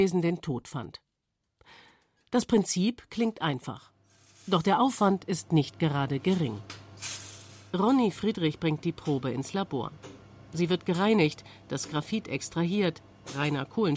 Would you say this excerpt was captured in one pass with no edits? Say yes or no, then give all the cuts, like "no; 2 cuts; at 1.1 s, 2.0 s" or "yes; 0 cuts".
yes; 0 cuts